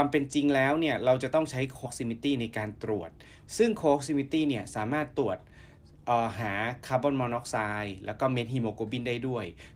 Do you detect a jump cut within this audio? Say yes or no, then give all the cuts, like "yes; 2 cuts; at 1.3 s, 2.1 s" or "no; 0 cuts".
yes; 1 cut; at 1.8 s